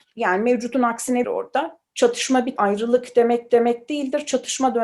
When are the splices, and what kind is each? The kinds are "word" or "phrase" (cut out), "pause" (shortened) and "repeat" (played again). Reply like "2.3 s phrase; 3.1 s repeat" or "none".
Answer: 1.2 s phrase; 1.8 s pause; 2.6 s word; 3.5 s repeat